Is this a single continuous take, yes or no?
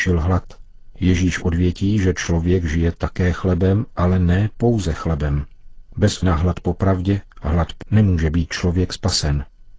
no